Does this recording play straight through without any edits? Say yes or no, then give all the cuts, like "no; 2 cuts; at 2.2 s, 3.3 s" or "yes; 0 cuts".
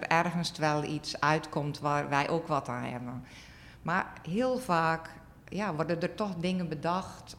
yes; 0 cuts